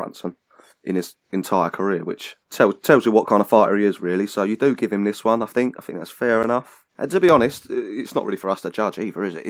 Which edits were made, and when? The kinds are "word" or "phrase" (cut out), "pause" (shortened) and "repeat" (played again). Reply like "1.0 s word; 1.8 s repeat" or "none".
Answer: 1.2 s pause; 2.4 s pause; 6.9 s pause